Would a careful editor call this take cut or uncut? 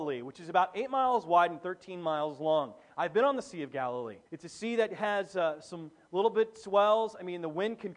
cut